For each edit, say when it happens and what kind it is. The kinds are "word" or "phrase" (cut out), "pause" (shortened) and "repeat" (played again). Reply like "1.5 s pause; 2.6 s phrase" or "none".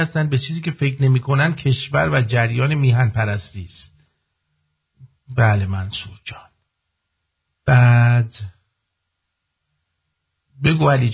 none